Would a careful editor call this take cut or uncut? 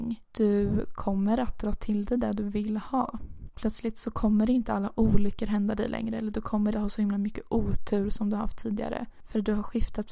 cut